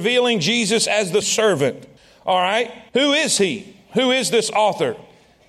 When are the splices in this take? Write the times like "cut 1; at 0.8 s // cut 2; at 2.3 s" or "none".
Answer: cut 1; at 1.2 s // cut 2; at 2.0 s // cut 3; at 2.9 s